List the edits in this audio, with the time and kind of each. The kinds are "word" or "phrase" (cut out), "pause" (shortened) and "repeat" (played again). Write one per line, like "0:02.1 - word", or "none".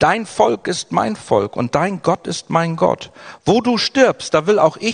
none